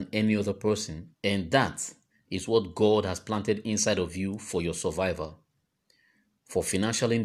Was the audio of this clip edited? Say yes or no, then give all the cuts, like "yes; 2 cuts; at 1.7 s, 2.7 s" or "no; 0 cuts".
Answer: yes; 1 cut; at 1.1 s